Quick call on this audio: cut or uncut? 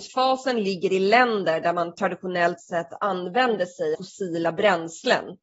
cut